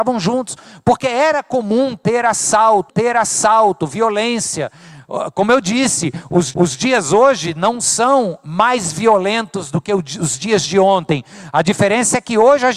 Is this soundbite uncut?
no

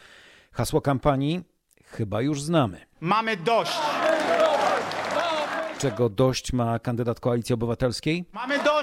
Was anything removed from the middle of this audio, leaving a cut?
no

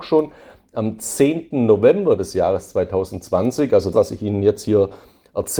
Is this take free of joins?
no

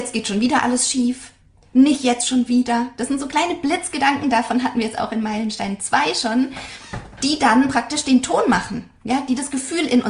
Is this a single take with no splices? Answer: yes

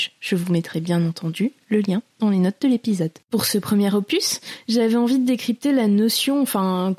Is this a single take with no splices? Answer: no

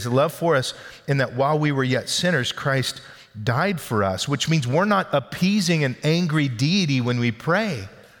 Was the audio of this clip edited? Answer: no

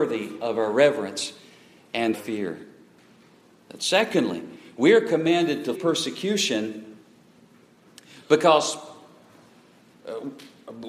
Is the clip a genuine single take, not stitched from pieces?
no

